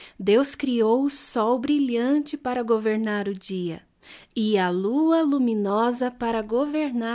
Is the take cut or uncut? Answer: uncut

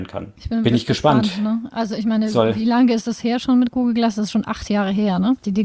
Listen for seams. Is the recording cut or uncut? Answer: uncut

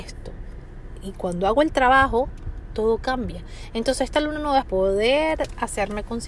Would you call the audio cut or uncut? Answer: cut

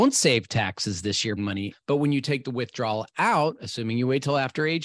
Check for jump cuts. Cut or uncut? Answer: cut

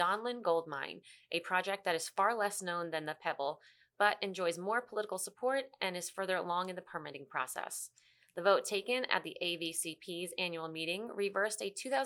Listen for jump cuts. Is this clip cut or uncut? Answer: uncut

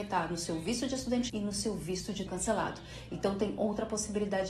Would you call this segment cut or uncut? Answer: cut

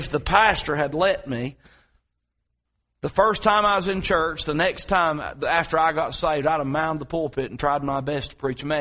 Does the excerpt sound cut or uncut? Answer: uncut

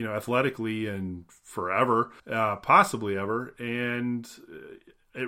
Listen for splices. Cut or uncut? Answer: cut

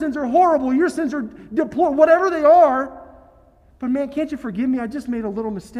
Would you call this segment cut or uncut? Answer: uncut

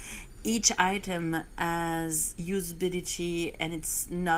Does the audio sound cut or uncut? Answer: cut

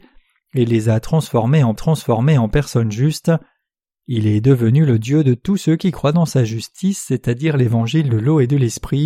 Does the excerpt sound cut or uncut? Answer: cut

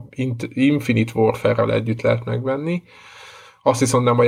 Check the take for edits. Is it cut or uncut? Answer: uncut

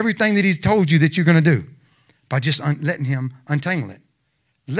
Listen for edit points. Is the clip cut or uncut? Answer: uncut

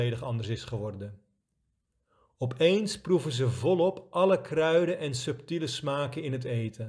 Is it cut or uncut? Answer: uncut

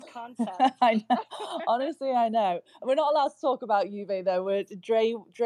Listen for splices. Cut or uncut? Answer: uncut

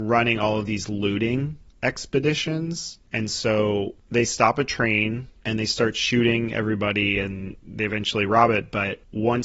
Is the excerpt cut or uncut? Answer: uncut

